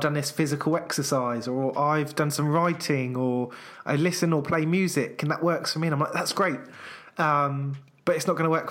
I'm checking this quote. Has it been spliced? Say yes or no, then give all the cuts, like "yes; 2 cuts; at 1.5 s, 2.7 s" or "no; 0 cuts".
no; 0 cuts